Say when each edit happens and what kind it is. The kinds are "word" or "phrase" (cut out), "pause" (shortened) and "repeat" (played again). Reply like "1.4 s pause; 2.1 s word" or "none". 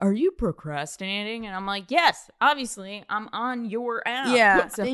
none